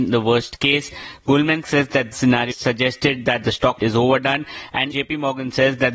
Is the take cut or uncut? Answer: cut